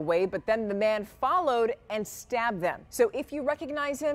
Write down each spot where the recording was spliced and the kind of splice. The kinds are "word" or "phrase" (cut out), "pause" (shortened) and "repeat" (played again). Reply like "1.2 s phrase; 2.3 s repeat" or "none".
2.9 s pause